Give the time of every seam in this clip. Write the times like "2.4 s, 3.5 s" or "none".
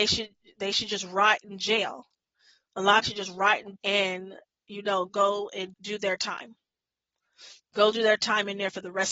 3.0 s, 3.8 s, 5.1 s, 5.7 s